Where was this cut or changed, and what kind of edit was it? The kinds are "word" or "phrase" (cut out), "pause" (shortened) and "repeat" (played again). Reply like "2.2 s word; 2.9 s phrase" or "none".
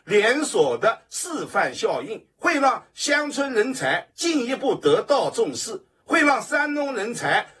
2.3 s pause